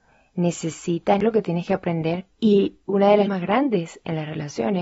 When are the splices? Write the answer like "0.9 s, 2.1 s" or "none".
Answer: 1.2 s, 3.3 s